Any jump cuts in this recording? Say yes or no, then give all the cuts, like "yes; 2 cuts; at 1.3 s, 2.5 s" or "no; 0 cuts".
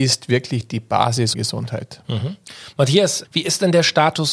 yes; 2 cuts; at 1.3 s, 3.2 s